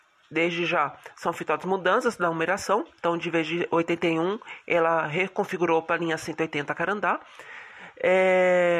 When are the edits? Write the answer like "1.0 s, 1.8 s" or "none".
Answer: none